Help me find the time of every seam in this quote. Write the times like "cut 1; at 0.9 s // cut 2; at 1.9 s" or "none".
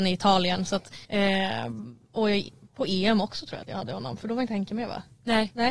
cut 1; at 1.0 s

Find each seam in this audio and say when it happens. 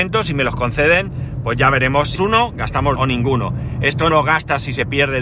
cut 1; at 2.2 s // cut 2; at 3.0 s // cut 3; at 4.1 s

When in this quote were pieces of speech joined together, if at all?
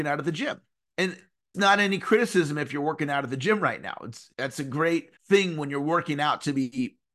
cut 1; at 1.5 s // cut 2; at 4.3 s // cut 3; at 5.2 s

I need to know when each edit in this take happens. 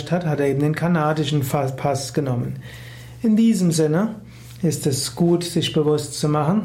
none

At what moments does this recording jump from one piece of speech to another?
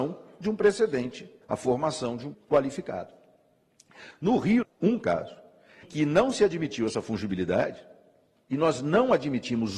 cut 1; at 1.4 s // cut 2; at 2.3 s // cut 3; at 4.6 s // cut 4; at 5.8 s

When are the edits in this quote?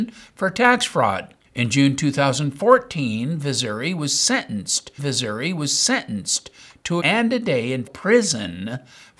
cut 1; at 1.4 s // cut 2; at 5.0 s // cut 3; at 7.0 s // cut 4; at 7.9 s

